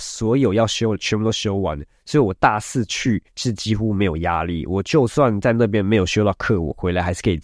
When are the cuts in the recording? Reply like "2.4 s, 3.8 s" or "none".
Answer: 3.3 s